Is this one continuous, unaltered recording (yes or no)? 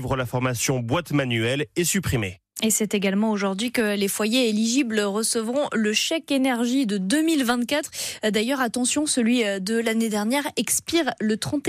yes